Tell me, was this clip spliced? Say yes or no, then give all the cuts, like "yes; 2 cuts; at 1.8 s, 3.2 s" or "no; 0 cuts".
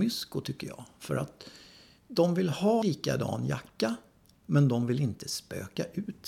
yes; 1 cut; at 2.8 s